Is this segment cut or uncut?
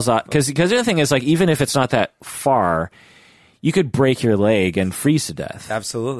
uncut